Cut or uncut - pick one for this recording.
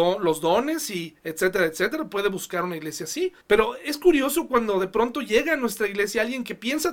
cut